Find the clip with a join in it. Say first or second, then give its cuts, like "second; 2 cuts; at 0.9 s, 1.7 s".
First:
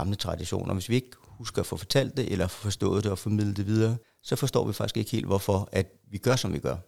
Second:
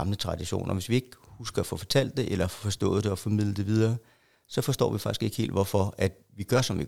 first; 1 cut; at 4.0 s